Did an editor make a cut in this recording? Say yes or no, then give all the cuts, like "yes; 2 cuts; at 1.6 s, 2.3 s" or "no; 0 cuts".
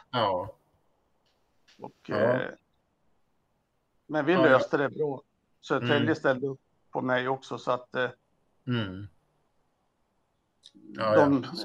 no; 0 cuts